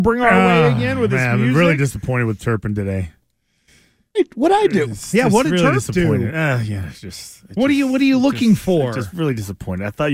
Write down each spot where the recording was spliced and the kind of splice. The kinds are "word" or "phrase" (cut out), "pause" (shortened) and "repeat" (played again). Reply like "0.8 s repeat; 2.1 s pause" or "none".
none